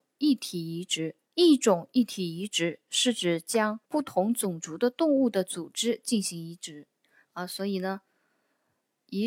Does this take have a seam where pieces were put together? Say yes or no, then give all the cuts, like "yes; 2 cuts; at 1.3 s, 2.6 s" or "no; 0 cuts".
yes; 3 cuts; at 1.2 s, 3.8 s, 7.0 s